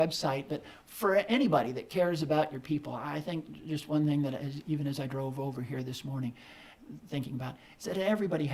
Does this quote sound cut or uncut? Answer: uncut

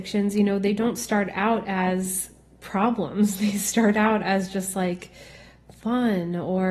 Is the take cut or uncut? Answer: uncut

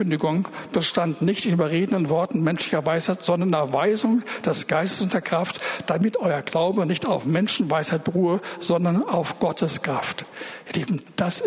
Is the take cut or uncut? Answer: uncut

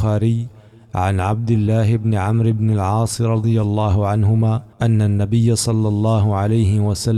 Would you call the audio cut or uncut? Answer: cut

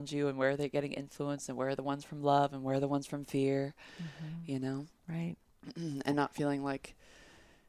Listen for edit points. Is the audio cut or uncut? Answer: cut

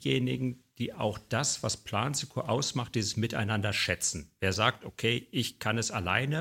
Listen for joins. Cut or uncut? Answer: uncut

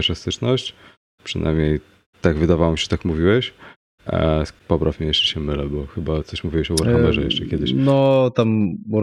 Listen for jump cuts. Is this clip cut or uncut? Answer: cut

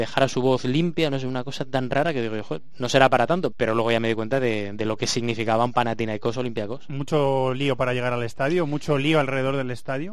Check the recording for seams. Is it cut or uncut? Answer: cut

